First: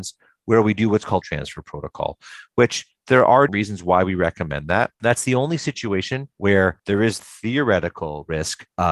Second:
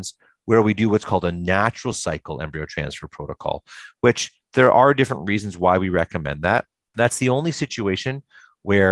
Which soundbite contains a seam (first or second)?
first